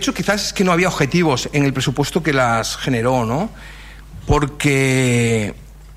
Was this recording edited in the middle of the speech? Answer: no; 0 cuts

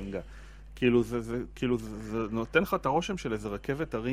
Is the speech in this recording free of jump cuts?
yes; 0 cuts

